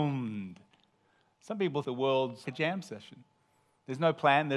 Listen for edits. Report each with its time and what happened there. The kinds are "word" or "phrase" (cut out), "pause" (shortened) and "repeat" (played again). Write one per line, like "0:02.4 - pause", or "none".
0:01.8 - word
0:02.4 - word